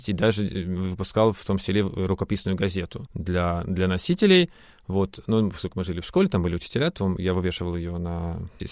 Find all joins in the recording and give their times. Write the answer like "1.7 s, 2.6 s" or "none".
none